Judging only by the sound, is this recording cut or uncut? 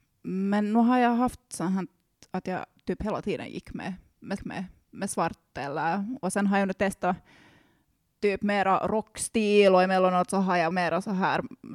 cut